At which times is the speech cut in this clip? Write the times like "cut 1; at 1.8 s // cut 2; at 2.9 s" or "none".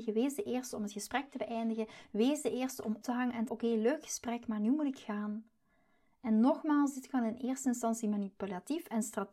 cut 1; at 3.0 s // cut 2; at 3.5 s